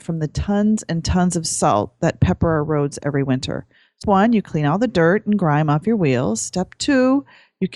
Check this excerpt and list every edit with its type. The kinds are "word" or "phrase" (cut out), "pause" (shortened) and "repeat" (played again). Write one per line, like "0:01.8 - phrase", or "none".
0:04.0 - word